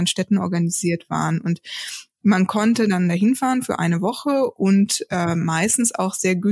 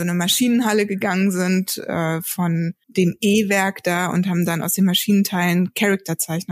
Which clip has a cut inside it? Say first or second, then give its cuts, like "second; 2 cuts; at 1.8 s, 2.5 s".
second; 1 cut; at 2.8 s